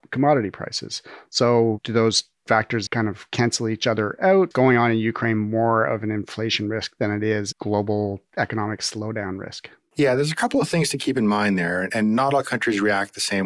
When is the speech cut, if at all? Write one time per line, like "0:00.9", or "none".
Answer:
0:02.9
0:04.5
0:07.5